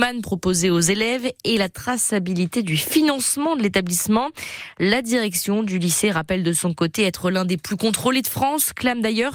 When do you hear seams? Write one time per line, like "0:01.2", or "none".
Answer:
none